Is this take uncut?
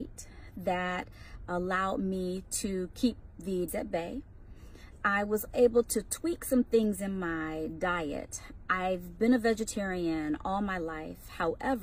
no; 2 cuts; at 3.7 s, 5.5 s

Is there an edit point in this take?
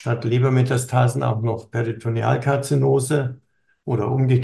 no; 0 cuts

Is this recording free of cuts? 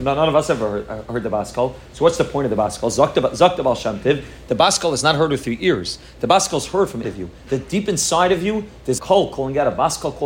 no; 2 cuts; at 7.0 s, 9.0 s

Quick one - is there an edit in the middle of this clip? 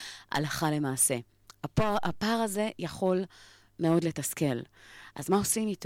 no; 0 cuts

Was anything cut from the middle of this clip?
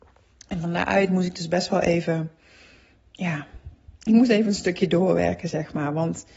yes; 1 cut; at 4.0 s

